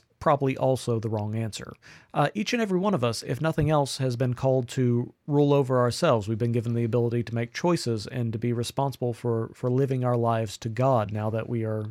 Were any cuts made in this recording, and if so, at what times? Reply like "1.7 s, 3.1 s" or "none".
none